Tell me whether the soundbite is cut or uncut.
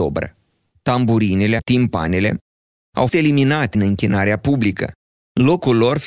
cut